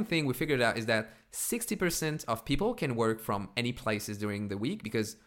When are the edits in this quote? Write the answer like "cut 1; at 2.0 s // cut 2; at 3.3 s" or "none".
none